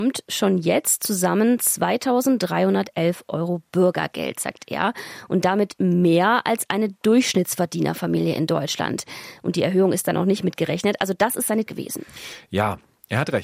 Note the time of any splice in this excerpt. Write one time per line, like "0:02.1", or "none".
0:11.7